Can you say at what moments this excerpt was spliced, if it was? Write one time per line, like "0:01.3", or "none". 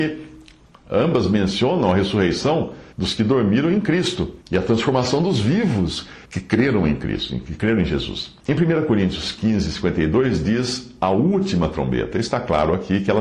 0:02.9
0:04.4
0:06.2
0:08.4